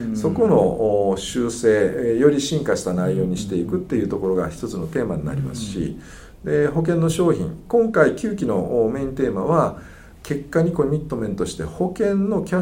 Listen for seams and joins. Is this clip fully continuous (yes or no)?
yes